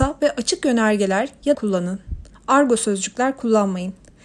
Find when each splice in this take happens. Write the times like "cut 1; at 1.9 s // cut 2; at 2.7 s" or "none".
cut 1; at 1.5 s // cut 2; at 2.3 s